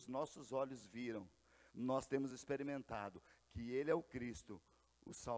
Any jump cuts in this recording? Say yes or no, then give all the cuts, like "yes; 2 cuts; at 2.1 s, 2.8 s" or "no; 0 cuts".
no; 0 cuts